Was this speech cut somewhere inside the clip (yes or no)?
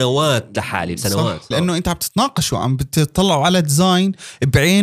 yes